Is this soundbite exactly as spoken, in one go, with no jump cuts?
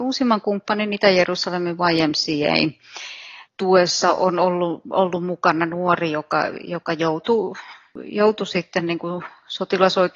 yes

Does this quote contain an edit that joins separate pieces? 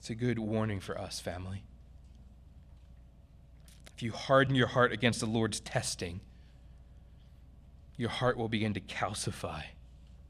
no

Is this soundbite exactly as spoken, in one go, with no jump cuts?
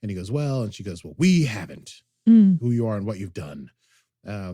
yes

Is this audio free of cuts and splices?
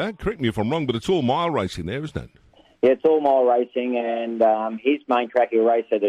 yes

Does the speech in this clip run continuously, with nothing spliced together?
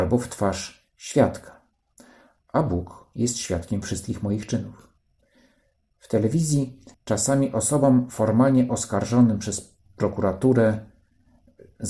no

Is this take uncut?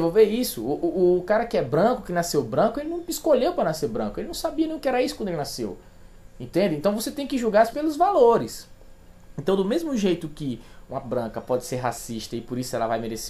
no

